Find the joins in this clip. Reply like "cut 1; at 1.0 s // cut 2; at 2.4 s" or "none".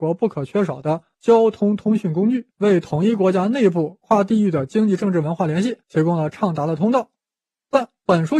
cut 1; at 2.5 s // cut 2; at 5.8 s

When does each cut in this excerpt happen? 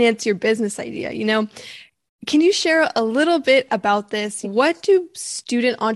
cut 1; at 4.4 s

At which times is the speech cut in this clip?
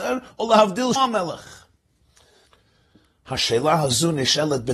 cut 1; at 1.0 s

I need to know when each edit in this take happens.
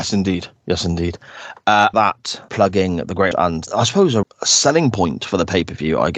cut 1; at 1.9 s // cut 2; at 2.5 s // cut 3; at 3.3 s // cut 4; at 3.7 s // cut 5; at 4.2 s

